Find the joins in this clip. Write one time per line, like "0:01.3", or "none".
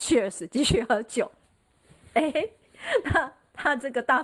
none